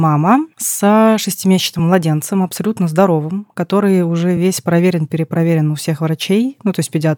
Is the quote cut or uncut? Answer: uncut